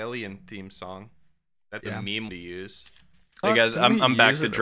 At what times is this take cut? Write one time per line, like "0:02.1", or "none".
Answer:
0:01.8
0:02.3
0:03.4